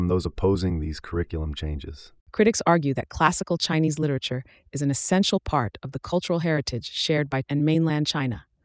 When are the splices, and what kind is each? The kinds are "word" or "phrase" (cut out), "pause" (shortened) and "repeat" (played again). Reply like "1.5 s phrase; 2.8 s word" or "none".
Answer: 2.2 s pause; 7.4 s word

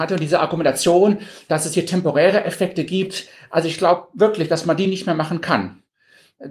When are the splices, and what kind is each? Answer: none

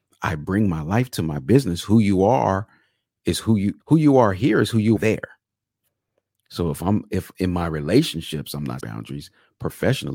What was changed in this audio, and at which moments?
3.8 s pause; 5.0 s word; 8.8 s word

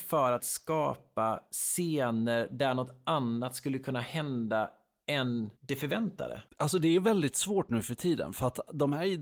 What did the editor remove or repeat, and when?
5.6 s pause; 6.5 s pause

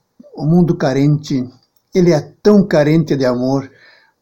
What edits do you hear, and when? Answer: none

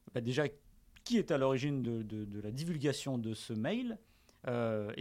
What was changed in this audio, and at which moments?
none

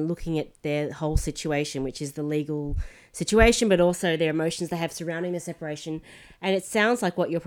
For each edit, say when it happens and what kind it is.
none

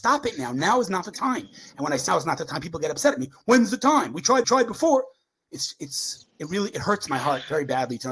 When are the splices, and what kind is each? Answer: 2.1 s word; 4.4 s repeat

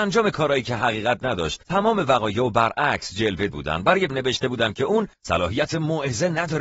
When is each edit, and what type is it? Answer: 3.5 s word; 4.1 s word

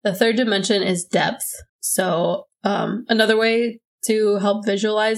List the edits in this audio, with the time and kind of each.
1.7 s pause

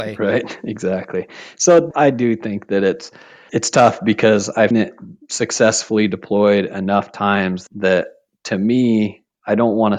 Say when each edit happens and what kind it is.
1.9 s word; 3.5 s word; 4.7 s word; 7.7 s word

